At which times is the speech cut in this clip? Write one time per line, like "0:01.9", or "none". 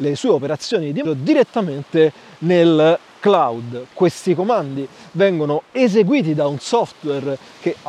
0:01.0